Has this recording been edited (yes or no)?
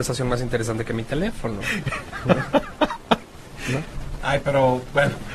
no